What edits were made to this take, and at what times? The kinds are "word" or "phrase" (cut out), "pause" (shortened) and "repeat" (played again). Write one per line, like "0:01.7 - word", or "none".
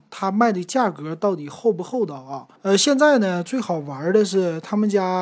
0:02.6 - pause

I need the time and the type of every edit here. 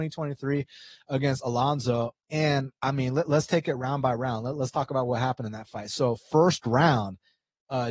0:02.8 - pause

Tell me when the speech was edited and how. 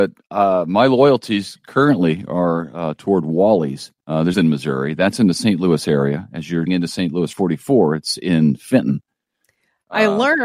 0:04.0 - pause
0:04.3 - phrase
0:06.7 - word
0:07.3 - phrase

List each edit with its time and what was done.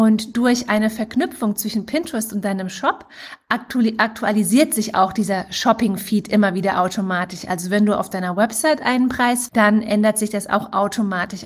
0:09.5 - word

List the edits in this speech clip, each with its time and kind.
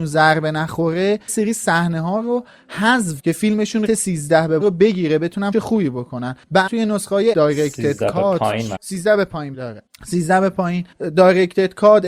0:01.3 - word
0:03.2 - word
0:03.9 - word
0:04.6 - word
0:05.5 - word
0:06.7 - word
0:07.3 - word
0:08.8 - word
0:09.5 - word

